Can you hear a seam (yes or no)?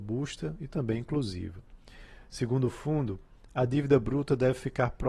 no